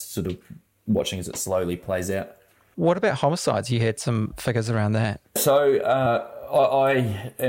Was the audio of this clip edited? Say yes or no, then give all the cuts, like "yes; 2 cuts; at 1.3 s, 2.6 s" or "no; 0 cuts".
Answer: no; 0 cuts